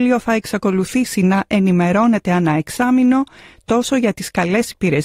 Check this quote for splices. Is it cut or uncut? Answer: uncut